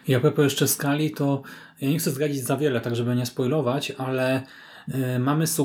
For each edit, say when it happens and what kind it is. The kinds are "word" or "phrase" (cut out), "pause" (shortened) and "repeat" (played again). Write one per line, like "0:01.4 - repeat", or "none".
none